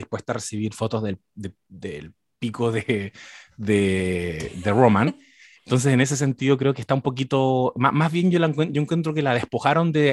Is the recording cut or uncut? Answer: uncut